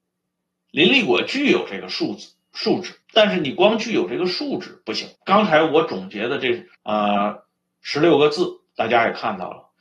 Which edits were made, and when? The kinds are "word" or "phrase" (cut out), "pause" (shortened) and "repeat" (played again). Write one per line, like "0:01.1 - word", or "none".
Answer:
0:03.0 - pause
0:05.2 - pause
0:06.7 - pause